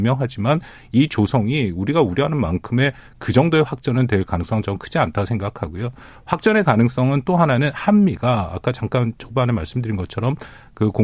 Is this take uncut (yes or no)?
yes